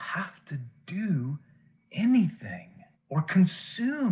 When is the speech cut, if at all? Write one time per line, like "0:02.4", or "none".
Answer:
0:02.9